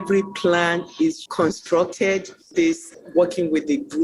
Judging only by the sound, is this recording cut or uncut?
cut